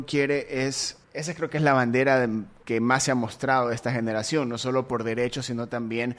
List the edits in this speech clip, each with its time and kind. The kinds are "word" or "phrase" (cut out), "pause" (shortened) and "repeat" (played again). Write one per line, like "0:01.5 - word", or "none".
0:01.0 - pause